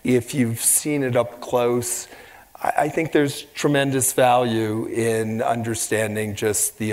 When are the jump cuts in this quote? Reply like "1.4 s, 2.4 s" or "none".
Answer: none